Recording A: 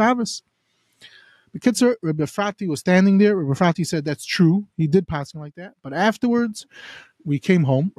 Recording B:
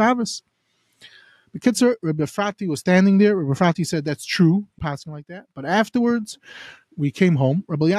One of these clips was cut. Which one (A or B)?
B